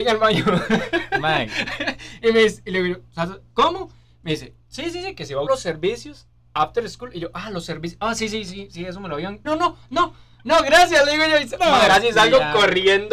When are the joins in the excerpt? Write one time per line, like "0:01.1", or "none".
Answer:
0:05.5
0:09.4
0:11.9